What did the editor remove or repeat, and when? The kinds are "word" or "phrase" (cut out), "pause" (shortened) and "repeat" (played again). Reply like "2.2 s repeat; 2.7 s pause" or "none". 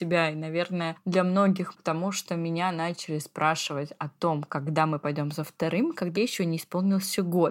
1.7 s word; 6.2 s word